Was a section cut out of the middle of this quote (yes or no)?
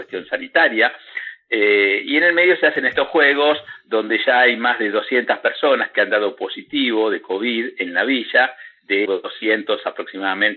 yes